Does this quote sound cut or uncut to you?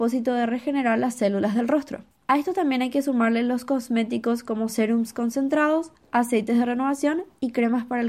uncut